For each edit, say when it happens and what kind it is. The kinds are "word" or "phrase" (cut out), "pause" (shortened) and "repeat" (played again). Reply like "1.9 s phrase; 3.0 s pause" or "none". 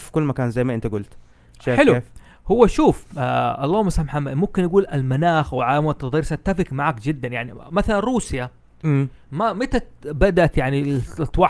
none